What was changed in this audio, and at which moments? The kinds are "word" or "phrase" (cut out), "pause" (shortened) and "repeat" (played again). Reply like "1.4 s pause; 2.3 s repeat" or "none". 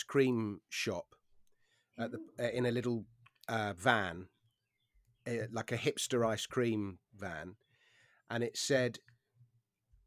none